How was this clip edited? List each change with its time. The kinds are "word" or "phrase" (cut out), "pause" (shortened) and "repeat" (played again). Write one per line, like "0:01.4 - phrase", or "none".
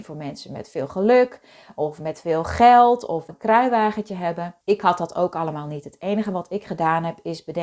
0:03.3 - phrase
0:04.6 - pause